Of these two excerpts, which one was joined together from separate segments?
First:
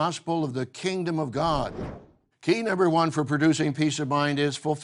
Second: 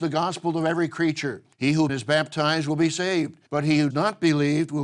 second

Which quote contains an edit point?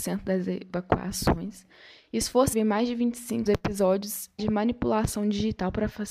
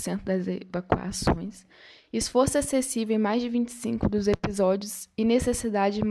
first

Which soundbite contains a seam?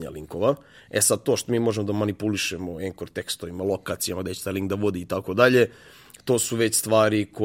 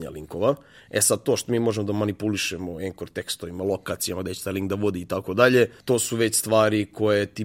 second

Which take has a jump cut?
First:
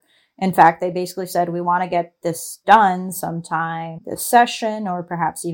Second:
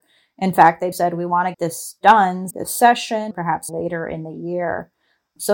second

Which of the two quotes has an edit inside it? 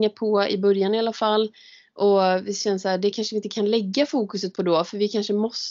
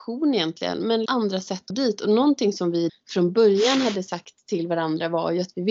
second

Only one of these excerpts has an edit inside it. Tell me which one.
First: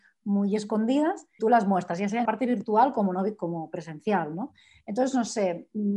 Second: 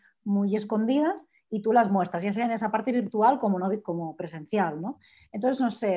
first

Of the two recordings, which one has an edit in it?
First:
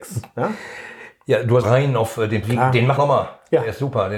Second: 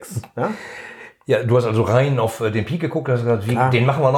first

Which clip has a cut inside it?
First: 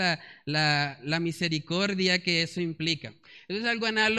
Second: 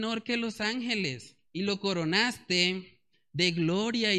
second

